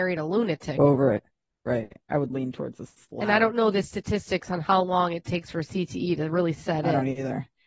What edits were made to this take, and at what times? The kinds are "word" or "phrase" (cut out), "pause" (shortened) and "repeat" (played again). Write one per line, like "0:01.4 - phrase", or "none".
none